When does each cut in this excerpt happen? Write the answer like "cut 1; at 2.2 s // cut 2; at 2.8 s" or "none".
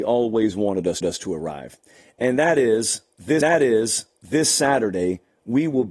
cut 1; at 1.0 s // cut 2; at 3.4 s